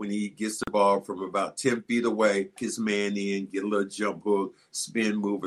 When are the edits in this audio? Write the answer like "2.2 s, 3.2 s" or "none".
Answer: 2.6 s